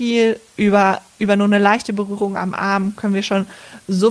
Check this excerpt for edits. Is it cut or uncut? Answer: uncut